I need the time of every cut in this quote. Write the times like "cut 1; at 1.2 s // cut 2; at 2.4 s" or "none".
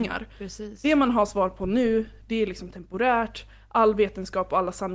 none